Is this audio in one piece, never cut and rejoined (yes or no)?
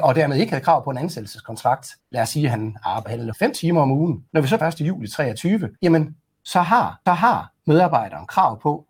no